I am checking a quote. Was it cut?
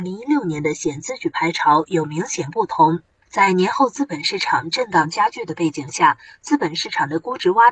yes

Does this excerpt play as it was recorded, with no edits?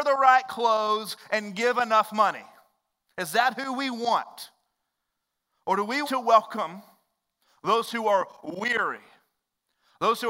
no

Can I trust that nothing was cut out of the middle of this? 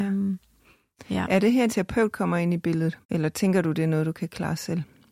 no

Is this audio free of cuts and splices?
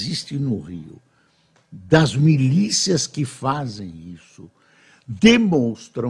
yes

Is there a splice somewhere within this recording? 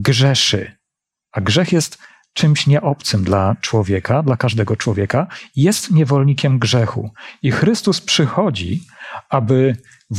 no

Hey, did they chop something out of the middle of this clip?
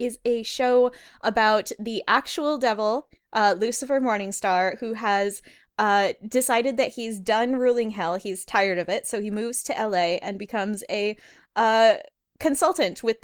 no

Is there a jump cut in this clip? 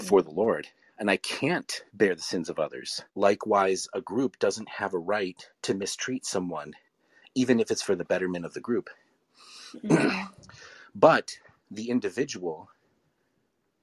yes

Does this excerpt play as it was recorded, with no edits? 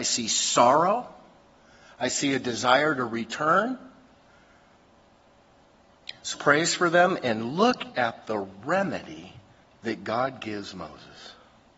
no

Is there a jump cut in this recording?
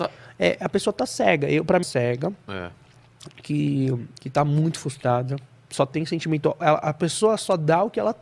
yes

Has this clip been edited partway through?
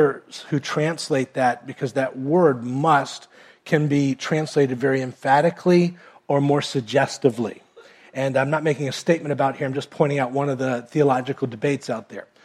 no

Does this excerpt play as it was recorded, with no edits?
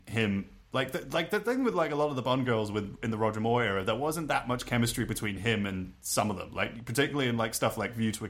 yes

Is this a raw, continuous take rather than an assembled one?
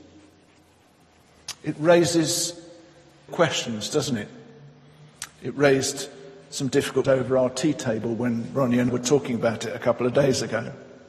no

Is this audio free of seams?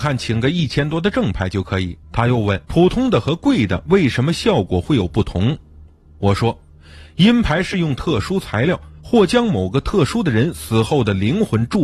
no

